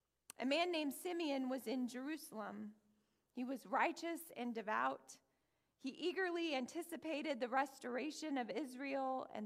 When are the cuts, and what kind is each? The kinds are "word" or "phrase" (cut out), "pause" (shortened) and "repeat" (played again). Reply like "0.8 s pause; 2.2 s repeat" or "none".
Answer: none

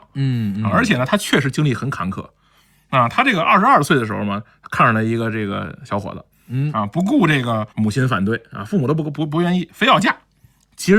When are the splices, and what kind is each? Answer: 7.7 s pause

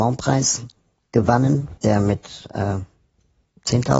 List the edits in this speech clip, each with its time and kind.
1.8 s pause

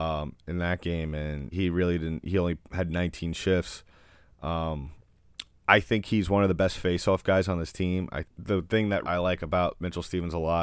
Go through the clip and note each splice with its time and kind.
1.5 s word; 8.2 s phrase; 9.0 s word

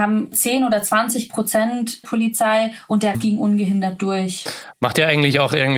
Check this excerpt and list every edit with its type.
2.0 s phrase; 3.1 s word

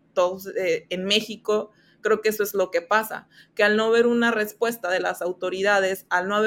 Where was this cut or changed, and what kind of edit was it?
none

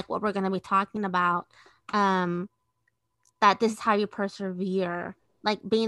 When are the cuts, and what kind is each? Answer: none

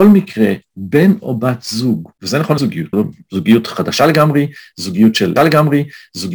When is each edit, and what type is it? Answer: 2.1 s pause; 2.6 s word; 2.9 s word; 5.4 s repeat

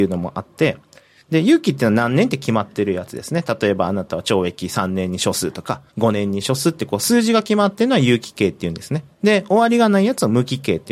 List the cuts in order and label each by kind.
5.9 s pause

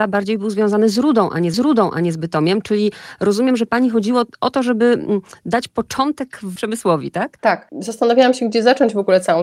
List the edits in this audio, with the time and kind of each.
1.5 s repeat; 6.6 s word

